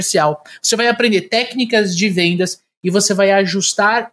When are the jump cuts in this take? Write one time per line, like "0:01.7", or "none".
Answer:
none